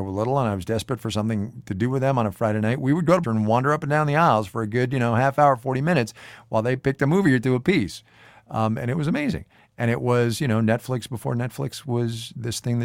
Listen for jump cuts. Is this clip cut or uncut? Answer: cut